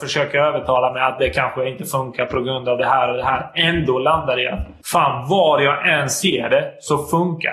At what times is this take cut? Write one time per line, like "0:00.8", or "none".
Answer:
0:04.8